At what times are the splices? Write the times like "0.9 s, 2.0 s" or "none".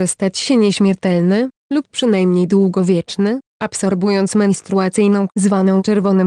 5.3 s

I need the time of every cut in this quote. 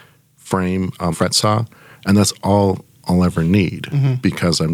1.1 s

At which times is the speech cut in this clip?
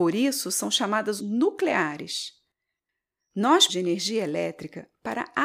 1.2 s, 3.7 s

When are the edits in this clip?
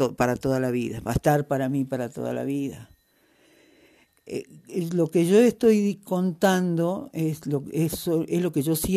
none

